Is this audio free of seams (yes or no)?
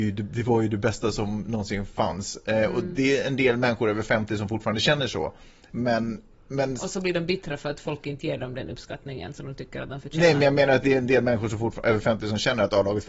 yes